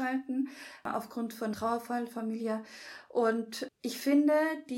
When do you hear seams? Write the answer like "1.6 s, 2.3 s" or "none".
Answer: 1.5 s, 3.7 s